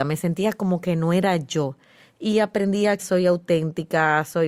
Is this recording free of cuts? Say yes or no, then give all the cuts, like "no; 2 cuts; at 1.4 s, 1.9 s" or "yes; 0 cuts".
no; 1 cut; at 3.0 s